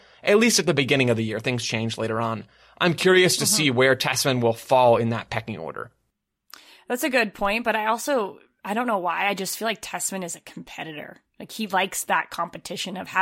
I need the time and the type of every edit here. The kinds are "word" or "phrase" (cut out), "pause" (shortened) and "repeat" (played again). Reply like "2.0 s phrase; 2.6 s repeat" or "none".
none